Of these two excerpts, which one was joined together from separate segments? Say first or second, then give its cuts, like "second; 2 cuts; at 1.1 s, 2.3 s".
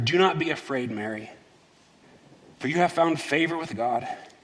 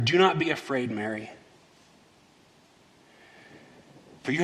first; 1 cut; at 2.0 s